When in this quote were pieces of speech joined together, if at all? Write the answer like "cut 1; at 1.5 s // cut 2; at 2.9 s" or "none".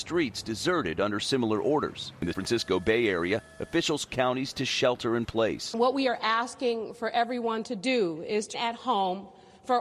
cut 1; at 2.3 s // cut 2; at 4.1 s // cut 3; at 8.5 s

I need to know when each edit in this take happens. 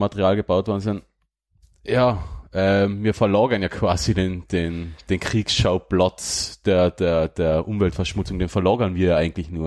none

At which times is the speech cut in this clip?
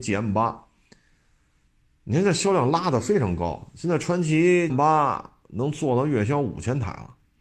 cut 1; at 4.7 s

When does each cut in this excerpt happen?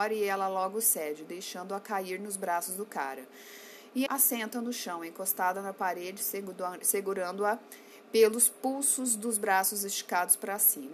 cut 1; at 4.1 s

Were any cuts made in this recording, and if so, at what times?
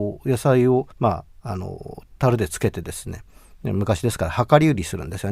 cut 1; at 0.9 s

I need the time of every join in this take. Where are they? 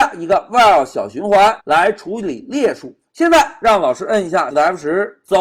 cut 1; at 1.6 s // cut 2; at 4.5 s

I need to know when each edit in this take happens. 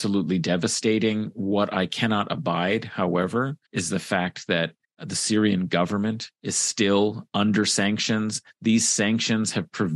cut 1; at 3.6 s // cut 2; at 4.8 s // cut 3; at 6.3 s

